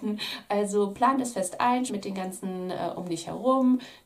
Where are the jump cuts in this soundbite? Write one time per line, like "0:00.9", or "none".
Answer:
0:01.9